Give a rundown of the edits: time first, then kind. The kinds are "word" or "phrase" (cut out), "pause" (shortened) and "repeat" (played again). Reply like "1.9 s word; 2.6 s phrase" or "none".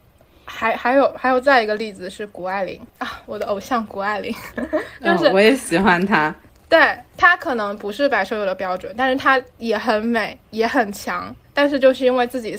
2.9 s pause; 6.5 s pause; 10.4 s pause